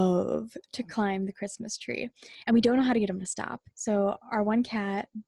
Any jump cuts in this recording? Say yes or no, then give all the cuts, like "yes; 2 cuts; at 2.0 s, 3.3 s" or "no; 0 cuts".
yes; 1 cut; at 3.7 s